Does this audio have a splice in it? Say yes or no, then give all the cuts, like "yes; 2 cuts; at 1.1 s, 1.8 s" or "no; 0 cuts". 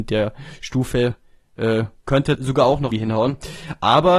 yes; 2 cuts; at 2.3 s, 2.9 s